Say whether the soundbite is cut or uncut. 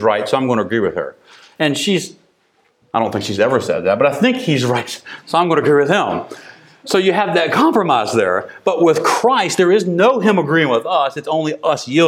uncut